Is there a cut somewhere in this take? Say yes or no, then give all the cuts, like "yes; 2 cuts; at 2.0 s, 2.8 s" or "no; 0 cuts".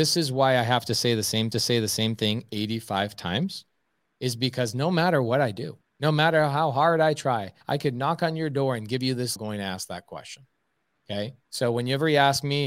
yes; 5 cuts; at 1.5 s, 5.8 s, 7.6 s, 9.4 s, 11.4 s